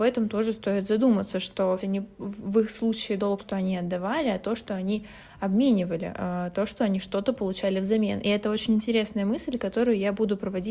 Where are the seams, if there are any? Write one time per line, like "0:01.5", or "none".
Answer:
0:01.8
0:03.4